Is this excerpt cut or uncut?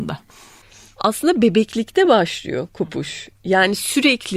uncut